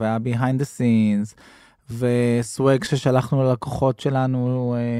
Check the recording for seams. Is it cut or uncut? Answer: uncut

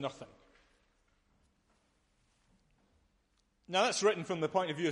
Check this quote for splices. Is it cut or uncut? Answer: uncut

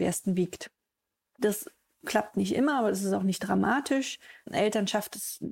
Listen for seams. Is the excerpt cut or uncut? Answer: uncut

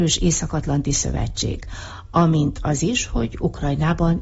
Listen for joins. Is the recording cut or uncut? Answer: uncut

